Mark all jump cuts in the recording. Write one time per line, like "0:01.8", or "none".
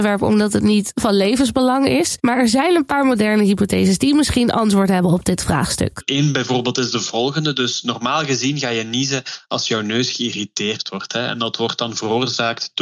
none